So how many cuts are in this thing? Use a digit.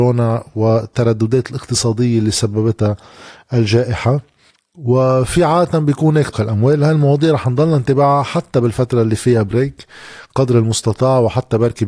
2